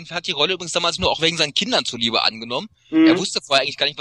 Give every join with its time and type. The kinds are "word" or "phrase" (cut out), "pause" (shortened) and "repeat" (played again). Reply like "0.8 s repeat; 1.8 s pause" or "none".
1.0 s word